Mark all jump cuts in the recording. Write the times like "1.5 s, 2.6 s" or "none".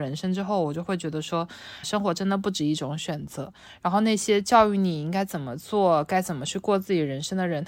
1.8 s